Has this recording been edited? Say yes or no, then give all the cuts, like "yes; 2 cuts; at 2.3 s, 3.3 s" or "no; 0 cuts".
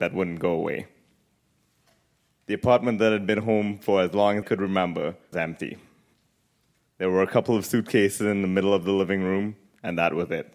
yes; 2 cuts; at 4.4 s, 5.3 s